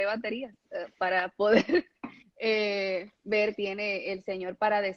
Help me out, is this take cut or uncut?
cut